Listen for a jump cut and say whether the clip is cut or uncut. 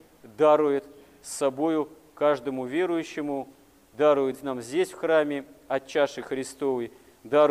uncut